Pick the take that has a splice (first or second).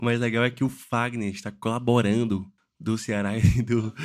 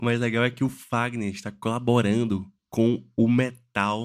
first